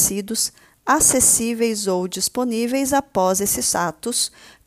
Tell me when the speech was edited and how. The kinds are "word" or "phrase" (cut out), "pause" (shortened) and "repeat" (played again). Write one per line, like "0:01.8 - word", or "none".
none